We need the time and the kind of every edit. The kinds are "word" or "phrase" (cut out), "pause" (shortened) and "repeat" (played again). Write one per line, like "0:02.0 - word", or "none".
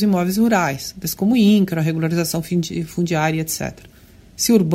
none